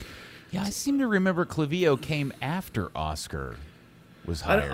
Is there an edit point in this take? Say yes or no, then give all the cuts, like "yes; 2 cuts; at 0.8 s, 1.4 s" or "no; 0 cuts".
no; 0 cuts